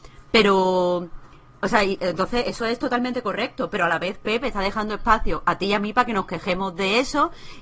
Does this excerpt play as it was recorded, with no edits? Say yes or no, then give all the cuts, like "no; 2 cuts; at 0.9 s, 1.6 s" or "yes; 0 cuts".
yes; 0 cuts